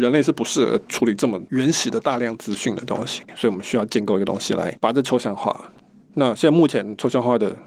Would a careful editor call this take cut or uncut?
cut